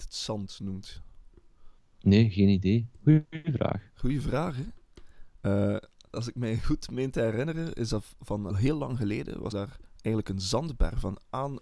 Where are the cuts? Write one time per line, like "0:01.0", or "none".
0:01.8
0:06.1
0:08.5
0:09.5